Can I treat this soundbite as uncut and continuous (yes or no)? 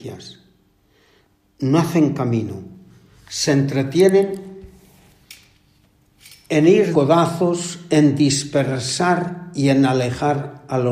no